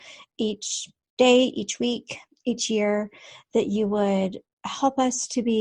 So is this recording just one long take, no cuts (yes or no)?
yes